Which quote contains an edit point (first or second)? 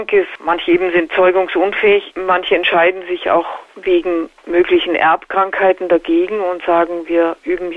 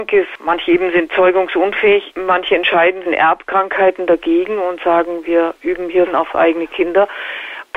second